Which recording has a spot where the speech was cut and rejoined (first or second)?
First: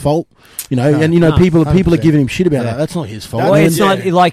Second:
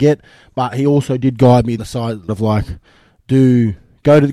second